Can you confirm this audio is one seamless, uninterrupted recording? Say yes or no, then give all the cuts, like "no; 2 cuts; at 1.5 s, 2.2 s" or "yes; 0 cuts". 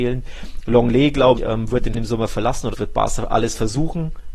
no; 3 cuts; at 1.4 s, 1.9 s, 2.7 s